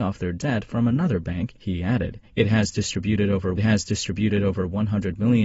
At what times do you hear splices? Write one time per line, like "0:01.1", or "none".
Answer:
0:01.6
0:02.3
0:03.6